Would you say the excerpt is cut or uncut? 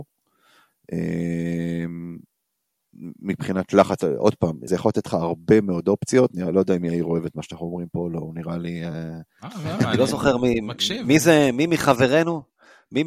cut